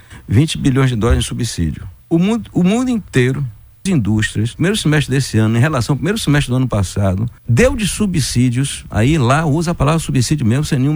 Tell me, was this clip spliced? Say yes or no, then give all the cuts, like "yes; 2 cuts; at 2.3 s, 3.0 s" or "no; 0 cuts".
yes; 4 cuts; at 2.0 s, 3.9 s, 4.5 s, 7.4 s